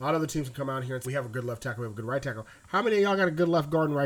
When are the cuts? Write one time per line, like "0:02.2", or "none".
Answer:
0:01.0